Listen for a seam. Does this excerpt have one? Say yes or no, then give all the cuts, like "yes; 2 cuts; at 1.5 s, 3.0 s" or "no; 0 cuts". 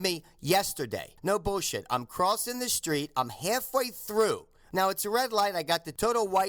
no; 0 cuts